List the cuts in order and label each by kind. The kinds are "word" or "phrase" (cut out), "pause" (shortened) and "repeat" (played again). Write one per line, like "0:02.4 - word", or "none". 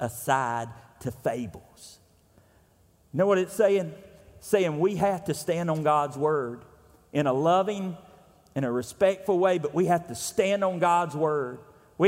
none